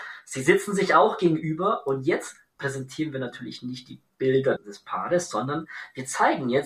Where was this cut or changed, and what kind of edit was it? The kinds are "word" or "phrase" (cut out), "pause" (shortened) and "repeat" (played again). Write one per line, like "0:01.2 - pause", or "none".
0:04.6 - word